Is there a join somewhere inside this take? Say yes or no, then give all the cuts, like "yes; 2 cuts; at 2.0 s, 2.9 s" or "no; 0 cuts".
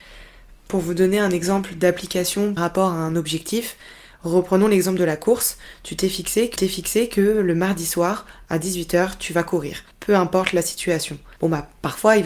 yes; 4 cuts; at 2.6 s, 6.6 s, 9.9 s, 11.4 s